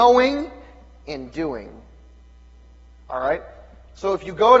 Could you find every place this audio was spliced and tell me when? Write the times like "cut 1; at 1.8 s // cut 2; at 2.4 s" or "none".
none